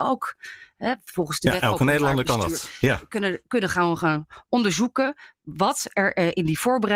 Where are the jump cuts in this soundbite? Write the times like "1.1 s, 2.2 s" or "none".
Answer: none